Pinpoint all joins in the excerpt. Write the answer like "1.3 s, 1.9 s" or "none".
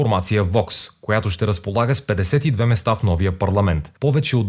none